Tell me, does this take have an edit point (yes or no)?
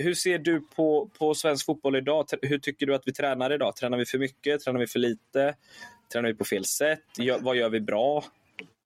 no